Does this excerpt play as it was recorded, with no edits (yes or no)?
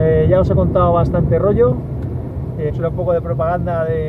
no